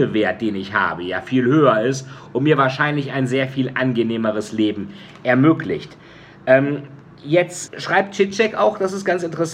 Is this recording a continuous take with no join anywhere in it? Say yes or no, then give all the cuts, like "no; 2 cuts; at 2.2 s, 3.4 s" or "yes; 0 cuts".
no; 1 cut; at 7.7 s